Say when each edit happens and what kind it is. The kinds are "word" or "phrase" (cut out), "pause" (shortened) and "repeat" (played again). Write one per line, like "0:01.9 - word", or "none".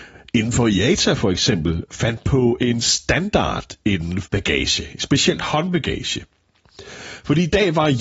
0:04.2 - word